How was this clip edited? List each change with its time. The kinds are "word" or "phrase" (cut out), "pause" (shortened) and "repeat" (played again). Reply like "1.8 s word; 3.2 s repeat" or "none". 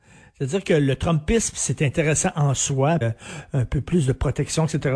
3.0 s phrase